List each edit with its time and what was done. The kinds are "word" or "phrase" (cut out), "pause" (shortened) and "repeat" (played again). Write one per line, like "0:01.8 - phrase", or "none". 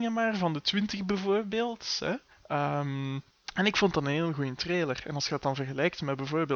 none